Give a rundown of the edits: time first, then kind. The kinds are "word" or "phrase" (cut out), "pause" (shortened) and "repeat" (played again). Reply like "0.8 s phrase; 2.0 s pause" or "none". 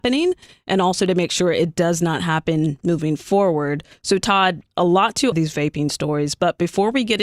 4.7 s pause; 5.3 s phrase